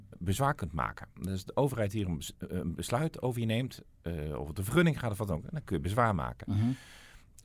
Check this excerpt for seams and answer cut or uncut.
uncut